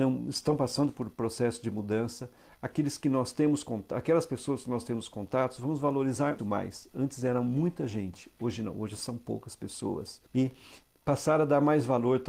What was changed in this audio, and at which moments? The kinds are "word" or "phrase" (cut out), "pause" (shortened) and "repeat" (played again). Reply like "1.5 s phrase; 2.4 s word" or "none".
6.4 s word; 10.3 s pause